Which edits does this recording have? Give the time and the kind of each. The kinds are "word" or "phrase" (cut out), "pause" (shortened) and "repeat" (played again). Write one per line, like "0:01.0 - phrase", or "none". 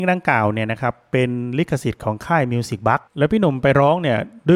0:03.1 - pause